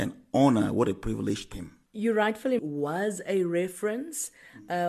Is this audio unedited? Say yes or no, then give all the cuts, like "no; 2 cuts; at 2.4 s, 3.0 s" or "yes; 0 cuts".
no; 3 cuts; at 1.5 s, 1.9 s, 2.6 s